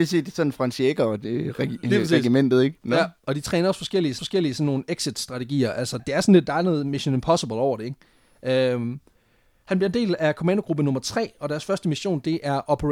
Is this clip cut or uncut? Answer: cut